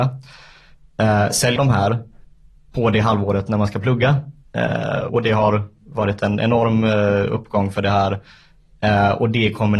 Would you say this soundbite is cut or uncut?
cut